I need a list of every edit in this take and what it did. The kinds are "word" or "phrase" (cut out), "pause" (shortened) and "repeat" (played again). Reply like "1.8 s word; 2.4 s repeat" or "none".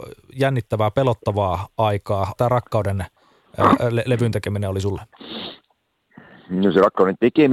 2.4 s phrase